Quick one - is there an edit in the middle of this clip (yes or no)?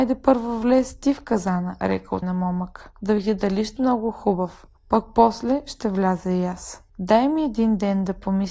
yes